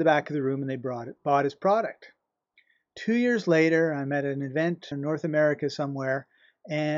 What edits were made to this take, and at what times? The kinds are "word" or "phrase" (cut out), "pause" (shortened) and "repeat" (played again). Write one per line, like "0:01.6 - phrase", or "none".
0:04.9 - word